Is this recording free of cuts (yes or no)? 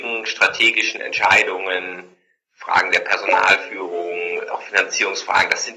no